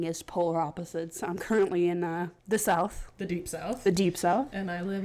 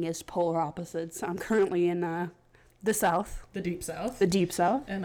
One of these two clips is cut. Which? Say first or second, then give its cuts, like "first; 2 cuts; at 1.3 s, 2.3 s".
first; 1 cut; at 2.4 s